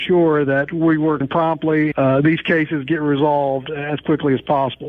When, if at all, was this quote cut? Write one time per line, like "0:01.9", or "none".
0:01.2
0:01.9

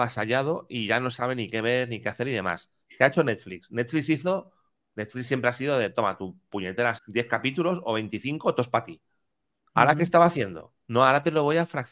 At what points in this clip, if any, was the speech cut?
0:07.0

